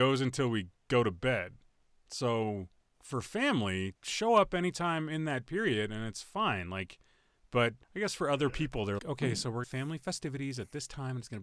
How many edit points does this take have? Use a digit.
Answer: 5